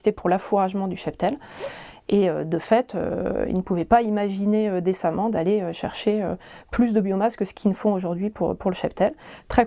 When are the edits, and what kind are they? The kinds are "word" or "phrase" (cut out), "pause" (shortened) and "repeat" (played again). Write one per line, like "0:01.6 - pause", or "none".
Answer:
none